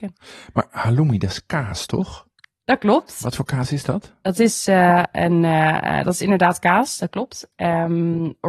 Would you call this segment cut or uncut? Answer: uncut